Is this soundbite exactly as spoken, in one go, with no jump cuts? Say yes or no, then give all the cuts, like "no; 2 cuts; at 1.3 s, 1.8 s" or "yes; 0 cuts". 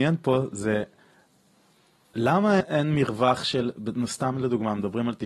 no; 1 cut; at 2.6 s